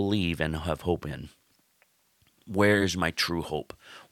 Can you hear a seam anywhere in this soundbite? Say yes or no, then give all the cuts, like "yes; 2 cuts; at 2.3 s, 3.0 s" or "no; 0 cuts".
no; 0 cuts